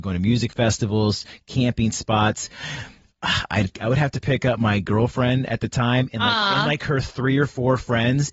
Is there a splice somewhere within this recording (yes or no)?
no